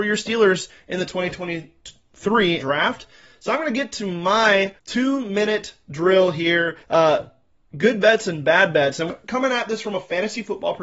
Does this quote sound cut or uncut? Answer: cut